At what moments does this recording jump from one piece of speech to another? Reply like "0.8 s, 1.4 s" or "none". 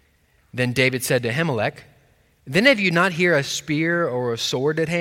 none